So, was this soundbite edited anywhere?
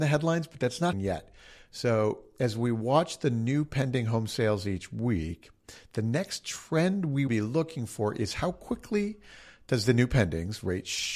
yes; 2 cuts; at 0.9 s, 7.3 s

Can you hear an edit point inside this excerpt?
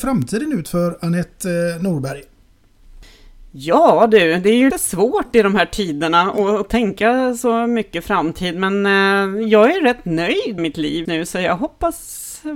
yes; 3 cuts; at 4.7 s, 10.6 s, 11.1 s

